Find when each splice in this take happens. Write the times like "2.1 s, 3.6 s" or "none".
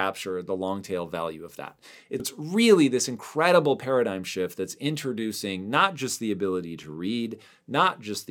2.2 s